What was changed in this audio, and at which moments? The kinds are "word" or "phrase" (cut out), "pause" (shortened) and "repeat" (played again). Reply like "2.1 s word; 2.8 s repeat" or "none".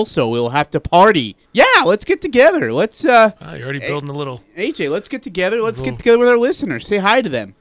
1.4 s pause